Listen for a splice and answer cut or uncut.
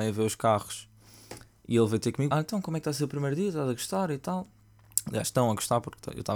cut